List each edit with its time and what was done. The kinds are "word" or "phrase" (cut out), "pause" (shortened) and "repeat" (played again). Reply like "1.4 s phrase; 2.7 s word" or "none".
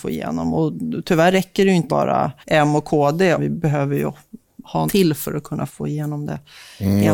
1.9 s word; 2.4 s pause; 3.4 s phrase; 4.9 s word; 5.7 s word